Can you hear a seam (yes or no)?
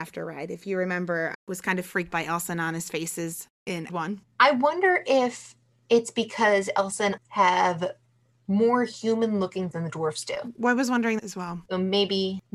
yes